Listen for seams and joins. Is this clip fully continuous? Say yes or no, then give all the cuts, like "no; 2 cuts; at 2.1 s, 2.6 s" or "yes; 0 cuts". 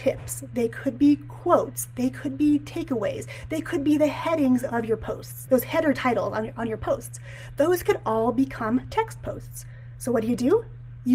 no; 1 cut; at 5.5 s